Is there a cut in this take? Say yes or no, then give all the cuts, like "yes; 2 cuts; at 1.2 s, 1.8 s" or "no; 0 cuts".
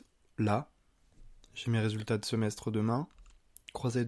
no; 0 cuts